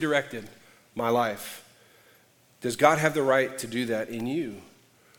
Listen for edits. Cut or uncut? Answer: uncut